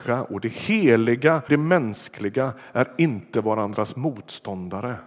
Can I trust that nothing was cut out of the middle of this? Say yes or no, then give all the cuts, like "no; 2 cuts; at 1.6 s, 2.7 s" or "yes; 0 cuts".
no; 1 cut; at 1.5 s